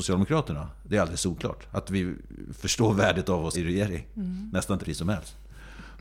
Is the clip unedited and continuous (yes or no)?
no